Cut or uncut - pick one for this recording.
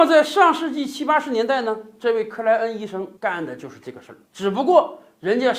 cut